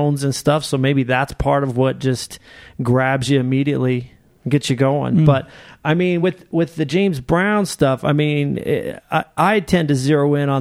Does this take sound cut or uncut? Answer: uncut